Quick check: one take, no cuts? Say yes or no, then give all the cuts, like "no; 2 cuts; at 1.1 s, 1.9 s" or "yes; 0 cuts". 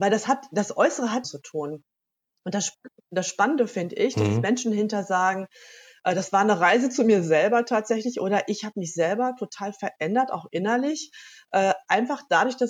no; 1 cut; at 1.2 s